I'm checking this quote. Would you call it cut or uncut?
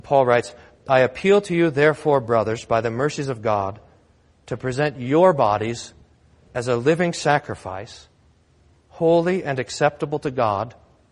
uncut